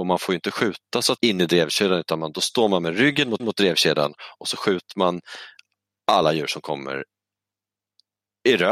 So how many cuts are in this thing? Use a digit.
2